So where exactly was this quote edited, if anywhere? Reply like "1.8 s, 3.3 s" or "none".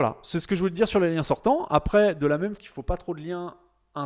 2.6 s